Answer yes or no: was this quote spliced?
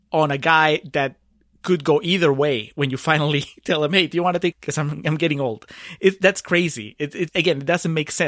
yes